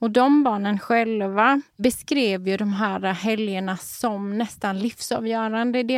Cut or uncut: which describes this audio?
cut